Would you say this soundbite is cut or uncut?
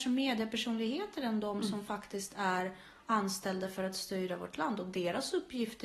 uncut